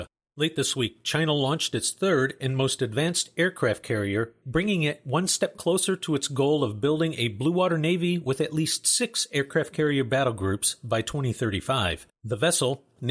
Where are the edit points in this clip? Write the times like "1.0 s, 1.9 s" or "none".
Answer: 12.2 s